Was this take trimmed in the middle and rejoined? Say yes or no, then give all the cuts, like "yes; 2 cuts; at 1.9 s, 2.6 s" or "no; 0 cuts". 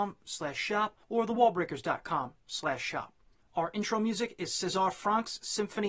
yes; 2 cuts; at 1.0 s, 3.4 s